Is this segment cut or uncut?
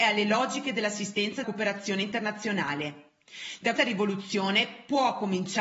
cut